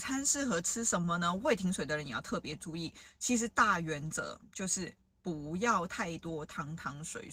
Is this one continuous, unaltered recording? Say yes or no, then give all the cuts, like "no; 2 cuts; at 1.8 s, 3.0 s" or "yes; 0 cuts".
yes; 0 cuts